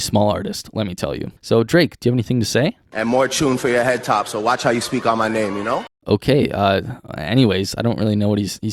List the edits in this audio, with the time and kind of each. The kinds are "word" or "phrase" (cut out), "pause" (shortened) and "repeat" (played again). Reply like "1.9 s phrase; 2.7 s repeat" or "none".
1.4 s pause; 6.0 s pause